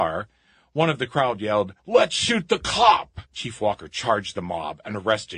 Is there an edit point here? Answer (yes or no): yes